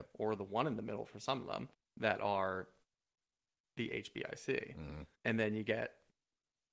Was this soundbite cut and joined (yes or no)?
yes